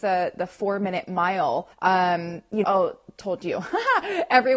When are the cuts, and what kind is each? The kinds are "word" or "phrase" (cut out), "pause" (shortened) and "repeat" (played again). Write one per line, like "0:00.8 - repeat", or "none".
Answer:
0:01.7 - pause
0:02.6 - phrase